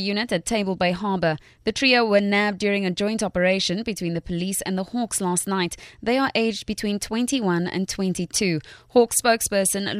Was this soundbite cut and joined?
no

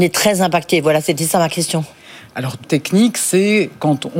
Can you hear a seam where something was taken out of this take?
yes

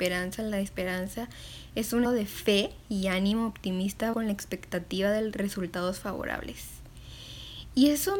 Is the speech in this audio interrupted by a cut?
yes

